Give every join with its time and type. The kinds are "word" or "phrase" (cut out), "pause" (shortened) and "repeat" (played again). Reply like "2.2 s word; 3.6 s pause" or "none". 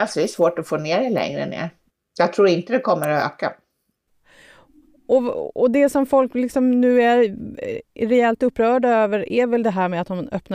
none